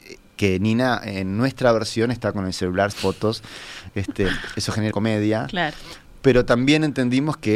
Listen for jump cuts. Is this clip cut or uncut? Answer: cut